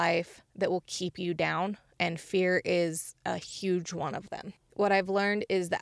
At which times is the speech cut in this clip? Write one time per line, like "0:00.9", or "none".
0:04.6